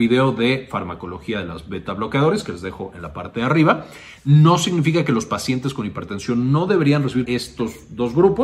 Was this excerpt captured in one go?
no; 1 cut; at 7.2 s

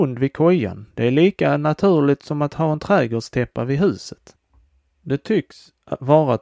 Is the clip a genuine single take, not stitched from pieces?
yes; 0 cuts

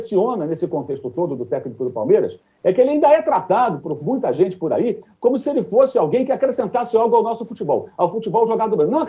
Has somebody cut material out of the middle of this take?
no; 0 cuts

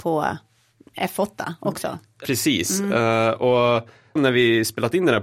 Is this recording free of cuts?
no; 2 cuts; at 2.2 s, 4.2 s

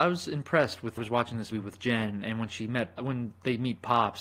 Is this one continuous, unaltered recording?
no; 3 cuts; at 1.0 s, 1.5 s, 3.0 s

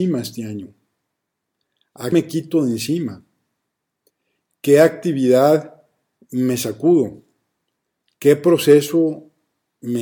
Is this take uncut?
no; 1 cut; at 2.1 s

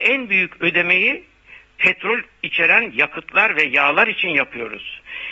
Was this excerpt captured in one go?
yes; 0 cuts

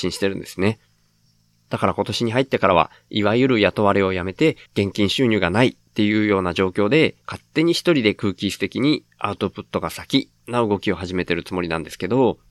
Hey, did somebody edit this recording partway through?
yes; 2 cuts; at 4.7 s, 7.2 s

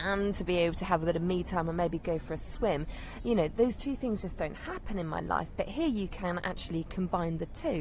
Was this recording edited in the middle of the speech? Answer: no; 0 cuts

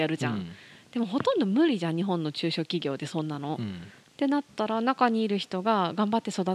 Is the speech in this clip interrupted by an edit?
no; 0 cuts

